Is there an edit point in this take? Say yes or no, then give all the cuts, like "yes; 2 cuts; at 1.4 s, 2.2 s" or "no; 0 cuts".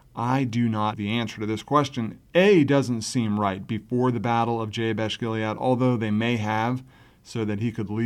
yes; 2 cuts; at 0.9 s, 2.3 s